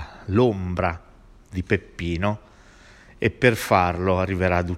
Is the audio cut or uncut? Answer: uncut